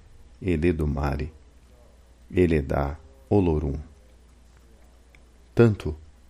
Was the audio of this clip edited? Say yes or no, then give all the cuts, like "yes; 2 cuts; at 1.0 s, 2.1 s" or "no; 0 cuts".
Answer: no; 0 cuts